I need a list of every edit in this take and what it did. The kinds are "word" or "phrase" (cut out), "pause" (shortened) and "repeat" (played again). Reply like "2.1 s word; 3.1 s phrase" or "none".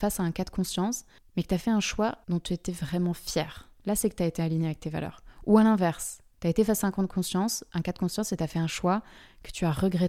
1.2 s pause; 2.2 s pause; 3.8 s pause